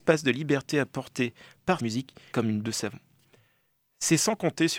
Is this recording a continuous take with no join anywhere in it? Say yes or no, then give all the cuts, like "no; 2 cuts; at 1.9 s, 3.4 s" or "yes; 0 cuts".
no; 3 cuts; at 1.8 s, 2.3 s, 2.6 s